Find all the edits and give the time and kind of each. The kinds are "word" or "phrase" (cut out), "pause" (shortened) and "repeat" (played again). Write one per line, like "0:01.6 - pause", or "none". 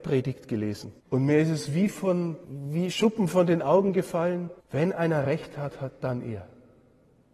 0:01.0 - pause
0:02.4 - pause
0:04.6 - pause